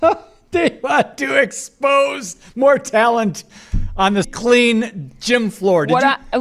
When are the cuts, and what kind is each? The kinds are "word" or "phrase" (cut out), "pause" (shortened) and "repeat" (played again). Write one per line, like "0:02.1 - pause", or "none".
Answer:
0:04.2 - word